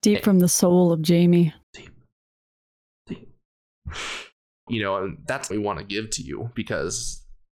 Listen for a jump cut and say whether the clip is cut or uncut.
cut